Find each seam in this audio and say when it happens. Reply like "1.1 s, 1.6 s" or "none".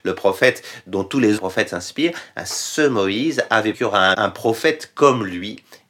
1.4 s, 3.7 s, 4.1 s